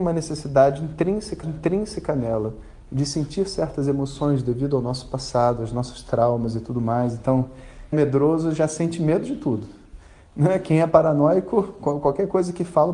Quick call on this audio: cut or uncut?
cut